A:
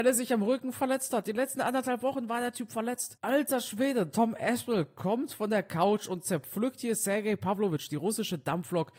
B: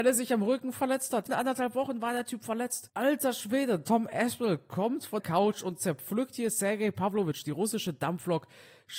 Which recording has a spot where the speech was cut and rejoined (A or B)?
B